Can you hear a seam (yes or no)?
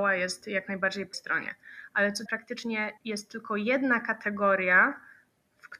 yes